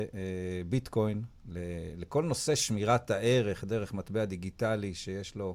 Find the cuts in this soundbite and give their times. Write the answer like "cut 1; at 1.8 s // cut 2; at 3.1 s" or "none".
cut 1; at 1.4 s